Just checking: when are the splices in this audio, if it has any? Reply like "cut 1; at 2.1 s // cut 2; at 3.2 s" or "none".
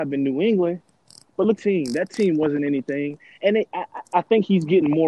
cut 1; at 1.6 s